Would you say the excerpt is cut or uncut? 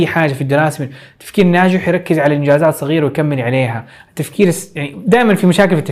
uncut